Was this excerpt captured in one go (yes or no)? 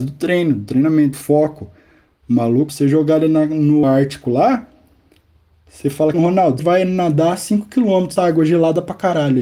no